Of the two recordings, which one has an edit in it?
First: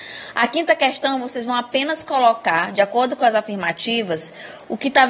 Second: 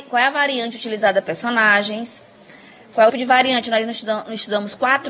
second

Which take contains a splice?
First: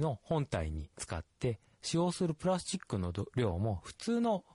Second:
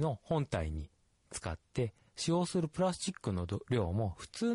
first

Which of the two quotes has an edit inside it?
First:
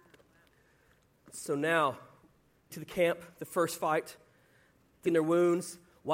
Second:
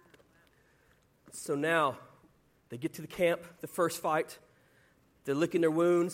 first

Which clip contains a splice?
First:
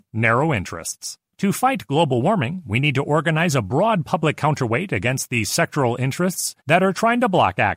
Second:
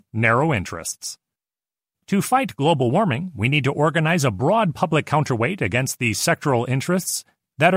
first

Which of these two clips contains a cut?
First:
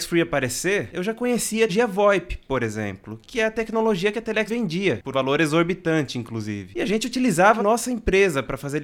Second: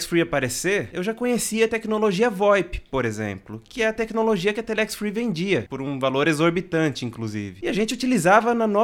first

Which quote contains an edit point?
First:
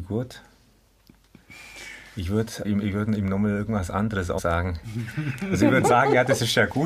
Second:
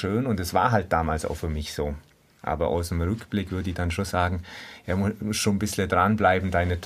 first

